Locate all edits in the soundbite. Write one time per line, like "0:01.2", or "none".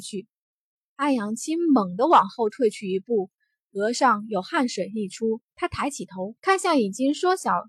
0:05.5
0:06.4

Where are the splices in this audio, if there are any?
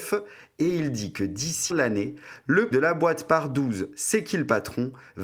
0:01.7
0:02.7

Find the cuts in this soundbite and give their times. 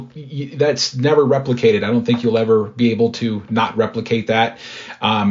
none

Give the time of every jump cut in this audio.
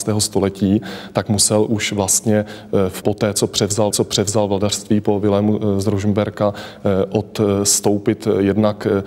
0:03.0
0:03.9

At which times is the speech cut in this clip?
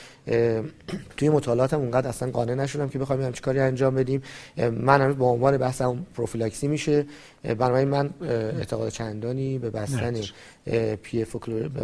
0:01.1

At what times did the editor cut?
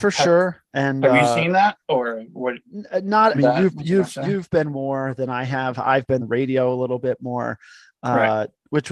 0:01.8
0:02.6
0:03.3
0:04.7
0:06.2

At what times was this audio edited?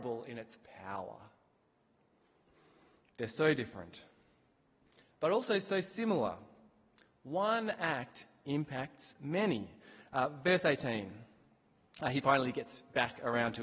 none

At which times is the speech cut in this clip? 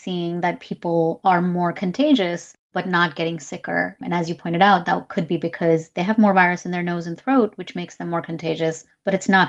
none

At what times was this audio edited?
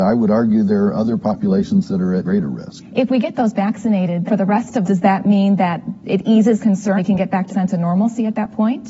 0:02.2
0:03.5
0:04.3
0:04.8
0:06.6
0:07.0
0:07.5

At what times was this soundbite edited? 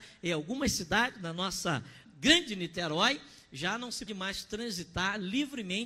0:02.0
0:04.1

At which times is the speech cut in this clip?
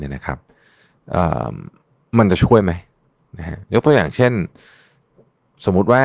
none

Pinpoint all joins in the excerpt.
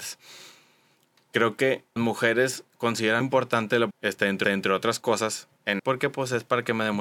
0:02.0
0:03.2
0:03.9
0:04.4
0:05.8

